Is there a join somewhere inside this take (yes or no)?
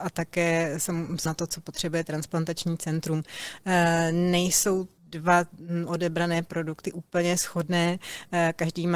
yes